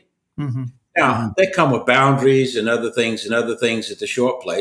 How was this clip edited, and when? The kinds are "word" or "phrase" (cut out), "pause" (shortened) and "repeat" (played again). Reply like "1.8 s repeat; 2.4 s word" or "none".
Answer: 3.3 s repeat